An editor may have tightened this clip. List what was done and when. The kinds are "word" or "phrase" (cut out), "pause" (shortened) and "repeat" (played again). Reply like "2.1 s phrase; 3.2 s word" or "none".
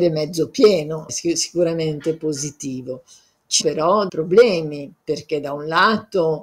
1.1 s word; 3.6 s word; 4.1 s word